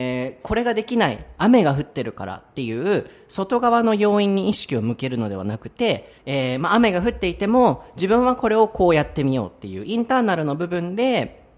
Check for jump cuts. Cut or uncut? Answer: cut